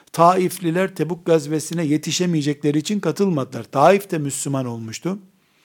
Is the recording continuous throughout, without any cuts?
yes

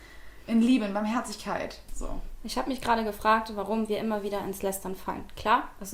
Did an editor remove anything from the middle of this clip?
no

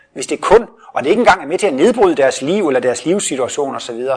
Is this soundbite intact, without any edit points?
yes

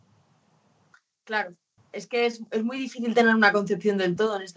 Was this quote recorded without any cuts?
no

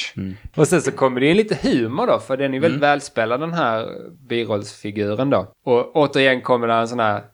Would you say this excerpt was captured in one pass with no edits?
no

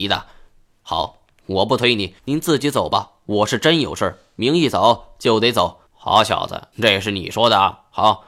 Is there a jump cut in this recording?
yes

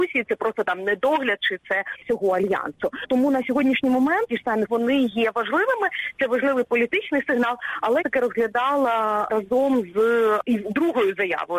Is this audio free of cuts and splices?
no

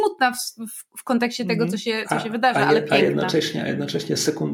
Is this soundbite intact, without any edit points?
yes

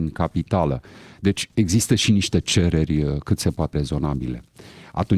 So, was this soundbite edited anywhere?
yes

